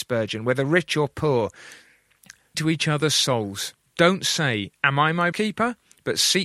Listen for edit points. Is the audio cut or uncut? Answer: cut